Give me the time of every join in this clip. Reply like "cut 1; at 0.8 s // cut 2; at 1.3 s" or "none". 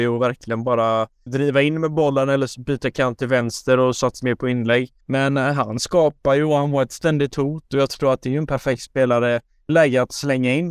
cut 1; at 1.3 s // cut 2; at 4.2 s // cut 3; at 5.0 s // cut 4; at 9.7 s